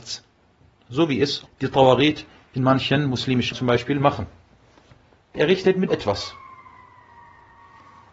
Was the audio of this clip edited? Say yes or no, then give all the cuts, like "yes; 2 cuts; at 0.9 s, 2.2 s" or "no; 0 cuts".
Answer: yes; 4 cuts; at 1.5 s, 3.5 s, 5.3 s, 5.9 s